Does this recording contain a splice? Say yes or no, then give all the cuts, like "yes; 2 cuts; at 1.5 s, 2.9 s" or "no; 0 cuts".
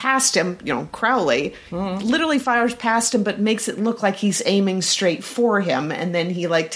no; 0 cuts